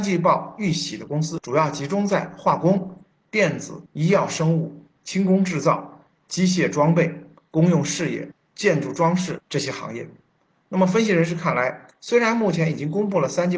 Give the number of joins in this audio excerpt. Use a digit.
1